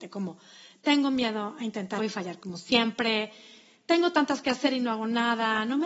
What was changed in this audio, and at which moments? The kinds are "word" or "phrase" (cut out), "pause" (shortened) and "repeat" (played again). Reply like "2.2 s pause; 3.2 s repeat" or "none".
2.0 s word; 4.4 s word